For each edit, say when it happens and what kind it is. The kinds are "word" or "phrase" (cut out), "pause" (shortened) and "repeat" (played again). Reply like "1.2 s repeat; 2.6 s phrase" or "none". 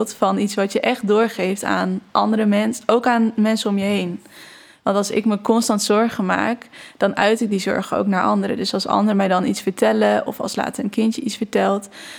none